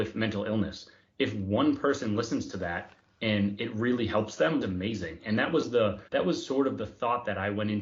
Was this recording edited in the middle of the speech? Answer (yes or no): yes